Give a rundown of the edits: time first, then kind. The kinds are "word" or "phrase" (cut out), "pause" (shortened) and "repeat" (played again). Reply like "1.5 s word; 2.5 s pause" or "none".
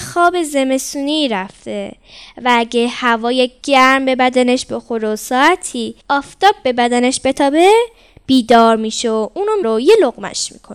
6.0 s pause; 9.6 s word